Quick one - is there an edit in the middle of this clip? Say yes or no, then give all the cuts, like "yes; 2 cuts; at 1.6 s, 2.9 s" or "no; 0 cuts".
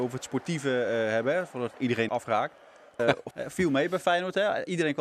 yes; 4 cuts; at 1.7 s, 2.1 s, 3.0 s, 3.3 s